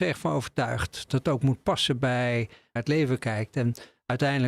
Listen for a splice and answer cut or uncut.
cut